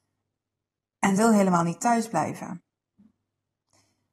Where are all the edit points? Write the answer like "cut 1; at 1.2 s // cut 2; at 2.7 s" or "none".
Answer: cut 1; at 1.2 s